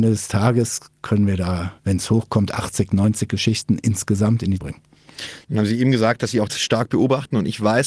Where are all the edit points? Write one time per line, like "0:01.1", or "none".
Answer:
0:01.8
0:04.6
0:06.5